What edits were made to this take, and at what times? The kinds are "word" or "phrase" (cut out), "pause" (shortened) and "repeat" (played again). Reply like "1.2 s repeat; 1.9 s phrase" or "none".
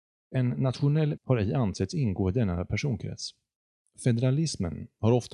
1.2 s word